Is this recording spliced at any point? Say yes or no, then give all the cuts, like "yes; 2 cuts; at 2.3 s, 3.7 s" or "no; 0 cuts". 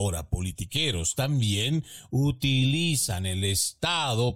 no; 0 cuts